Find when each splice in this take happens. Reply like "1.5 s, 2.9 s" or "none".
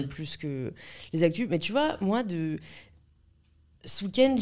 none